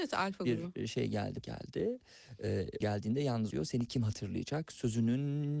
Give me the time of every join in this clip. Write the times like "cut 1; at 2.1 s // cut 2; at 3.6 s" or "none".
cut 1; at 1.4 s // cut 2; at 2.8 s // cut 3; at 3.5 s